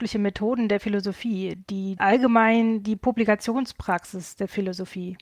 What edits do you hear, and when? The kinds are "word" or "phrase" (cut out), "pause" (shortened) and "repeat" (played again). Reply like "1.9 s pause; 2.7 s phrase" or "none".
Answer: 2.0 s phrase